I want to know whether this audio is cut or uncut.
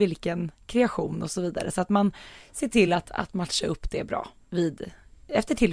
uncut